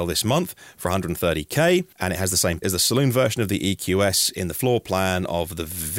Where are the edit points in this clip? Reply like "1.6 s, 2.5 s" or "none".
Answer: 1.9 s, 2.6 s